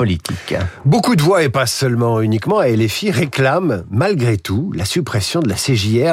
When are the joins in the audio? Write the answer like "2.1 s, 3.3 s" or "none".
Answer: none